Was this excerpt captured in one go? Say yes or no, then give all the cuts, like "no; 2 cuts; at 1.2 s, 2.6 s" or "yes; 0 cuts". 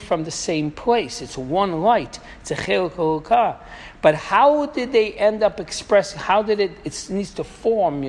yes; 0 cuts